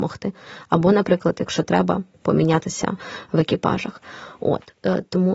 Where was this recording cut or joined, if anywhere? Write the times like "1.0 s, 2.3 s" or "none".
none